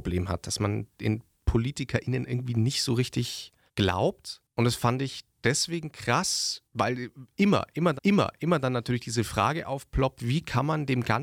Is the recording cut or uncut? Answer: cut